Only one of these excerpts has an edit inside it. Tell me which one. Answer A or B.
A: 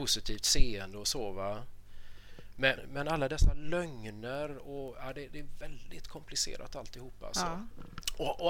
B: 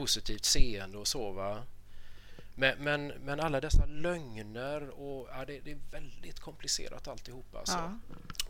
A